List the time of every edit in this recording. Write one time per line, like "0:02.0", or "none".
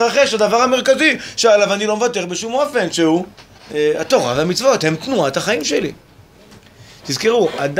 0:03.6